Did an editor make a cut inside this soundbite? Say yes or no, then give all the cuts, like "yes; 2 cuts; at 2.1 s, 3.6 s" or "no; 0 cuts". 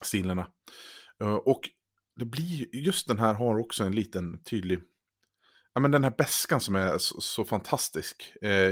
no; 0 cuts